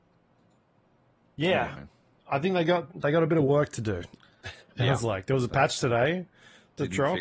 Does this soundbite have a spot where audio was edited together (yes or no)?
no